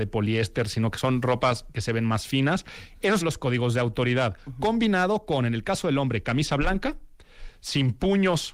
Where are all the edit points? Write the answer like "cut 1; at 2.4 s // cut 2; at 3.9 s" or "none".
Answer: cut 1; at 3.2 s